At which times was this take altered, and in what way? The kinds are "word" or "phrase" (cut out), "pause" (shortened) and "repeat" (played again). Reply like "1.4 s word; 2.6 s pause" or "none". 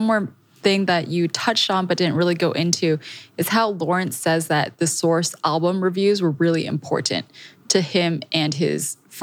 none